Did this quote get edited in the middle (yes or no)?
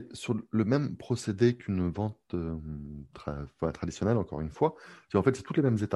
no